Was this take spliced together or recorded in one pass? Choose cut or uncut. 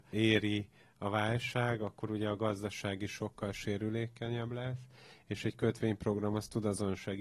uncut